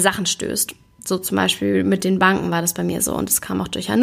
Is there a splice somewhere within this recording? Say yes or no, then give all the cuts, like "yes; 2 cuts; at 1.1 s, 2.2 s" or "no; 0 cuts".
no; 0 cuts